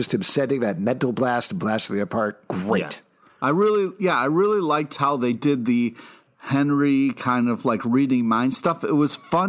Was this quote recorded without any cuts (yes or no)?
yes